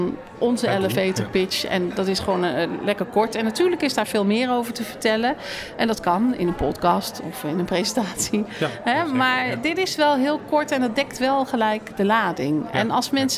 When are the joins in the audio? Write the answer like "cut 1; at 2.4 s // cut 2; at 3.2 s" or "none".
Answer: none